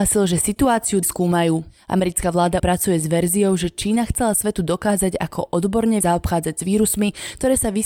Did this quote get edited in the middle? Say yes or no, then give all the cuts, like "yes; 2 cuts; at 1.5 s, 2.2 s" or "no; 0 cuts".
yes; 3 cuts; at 1.0 s, 2.6 s, 6.0 s